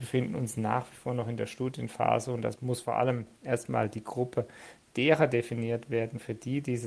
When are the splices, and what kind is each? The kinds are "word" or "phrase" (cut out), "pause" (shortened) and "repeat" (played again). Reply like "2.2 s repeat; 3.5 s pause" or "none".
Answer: 2.6 s phrase